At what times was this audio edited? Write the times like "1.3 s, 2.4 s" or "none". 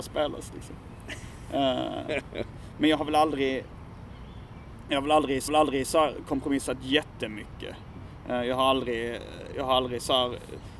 5.5 s